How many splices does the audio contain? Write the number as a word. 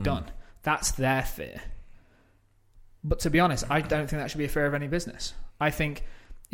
zero